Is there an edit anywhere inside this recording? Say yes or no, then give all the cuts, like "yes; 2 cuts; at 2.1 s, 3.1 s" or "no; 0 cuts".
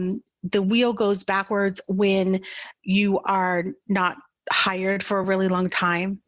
no; 0 cuts